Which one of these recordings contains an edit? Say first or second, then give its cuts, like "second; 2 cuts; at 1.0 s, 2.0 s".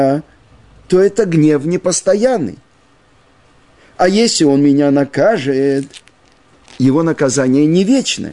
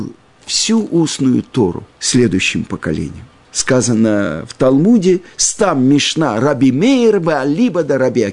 second; 2 cuts; at 1.9 s, 5.3 s